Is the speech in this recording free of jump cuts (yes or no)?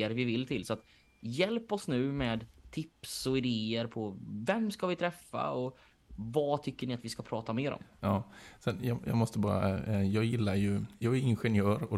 yes